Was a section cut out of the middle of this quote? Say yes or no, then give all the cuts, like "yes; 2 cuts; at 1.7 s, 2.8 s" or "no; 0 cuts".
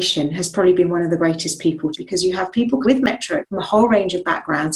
yes; 3 cuts; at 1.9 s, 2.8 s, 3.4 s